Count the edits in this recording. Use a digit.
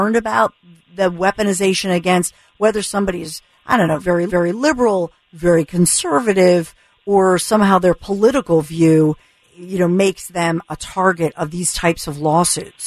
2